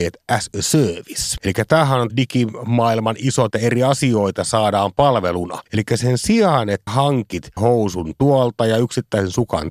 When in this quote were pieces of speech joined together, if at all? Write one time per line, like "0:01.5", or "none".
0:01.4
0:02.1
0:03.5
0:05.7
0:06.9
0:07.6